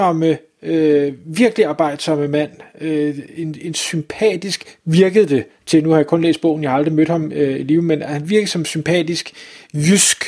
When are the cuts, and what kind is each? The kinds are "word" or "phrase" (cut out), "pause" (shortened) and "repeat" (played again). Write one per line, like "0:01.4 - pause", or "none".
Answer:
none